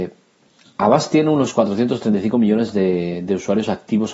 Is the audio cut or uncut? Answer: uncut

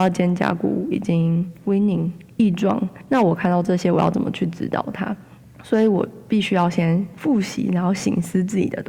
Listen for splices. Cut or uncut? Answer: cut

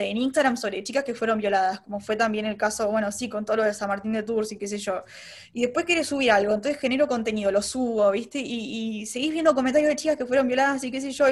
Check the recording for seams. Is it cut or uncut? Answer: uncut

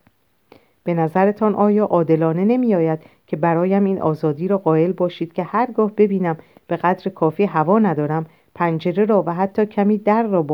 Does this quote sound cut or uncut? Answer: uncut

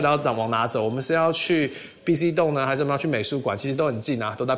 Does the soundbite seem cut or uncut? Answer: uncut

